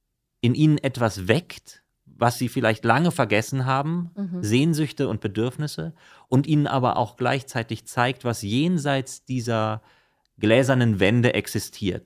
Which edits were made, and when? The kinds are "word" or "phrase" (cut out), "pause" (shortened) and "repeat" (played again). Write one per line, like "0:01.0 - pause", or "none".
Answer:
none